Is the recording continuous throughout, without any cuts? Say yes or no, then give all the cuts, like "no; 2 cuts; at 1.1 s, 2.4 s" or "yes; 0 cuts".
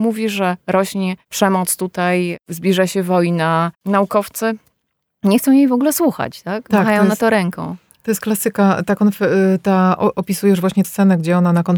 no; 2 cuts; at 3.8 s, 10.8 s